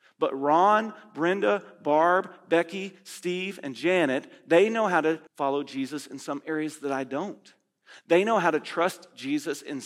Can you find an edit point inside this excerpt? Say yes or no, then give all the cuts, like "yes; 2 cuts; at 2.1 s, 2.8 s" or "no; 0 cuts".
yes; 1 cut; at 5.3 s